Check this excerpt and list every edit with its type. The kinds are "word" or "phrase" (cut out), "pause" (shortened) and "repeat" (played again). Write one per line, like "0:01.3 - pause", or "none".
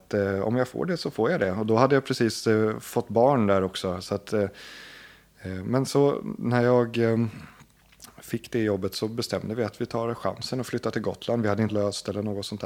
0:11.7 - word